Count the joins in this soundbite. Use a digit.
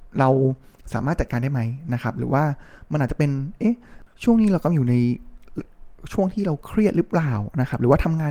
1